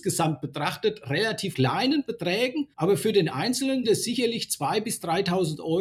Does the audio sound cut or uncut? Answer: cut